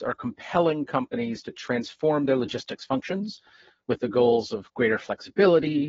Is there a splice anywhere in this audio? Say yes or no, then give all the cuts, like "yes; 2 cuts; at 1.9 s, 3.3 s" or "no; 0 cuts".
no; 0 cuts